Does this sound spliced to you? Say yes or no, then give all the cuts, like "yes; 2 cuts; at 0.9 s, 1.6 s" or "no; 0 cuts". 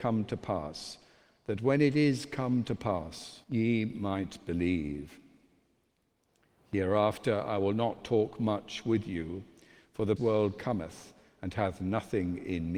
yes; 2 cuts; at 3.4 s, 10.2 s